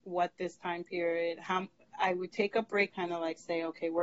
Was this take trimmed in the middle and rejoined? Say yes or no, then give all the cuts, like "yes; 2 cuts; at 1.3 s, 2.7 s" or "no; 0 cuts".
yes; 1 cut; at 2.9 s